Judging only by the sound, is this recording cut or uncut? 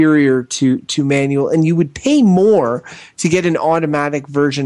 uncut